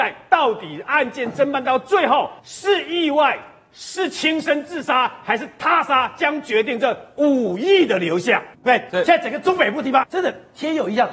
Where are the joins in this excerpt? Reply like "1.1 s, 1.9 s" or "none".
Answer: 2.4 s, 8.9 s, 10.0 s